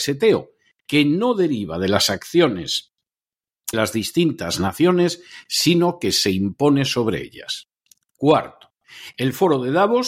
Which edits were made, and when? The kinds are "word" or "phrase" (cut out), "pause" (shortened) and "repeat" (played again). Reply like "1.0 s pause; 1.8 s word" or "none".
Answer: 3.7 s word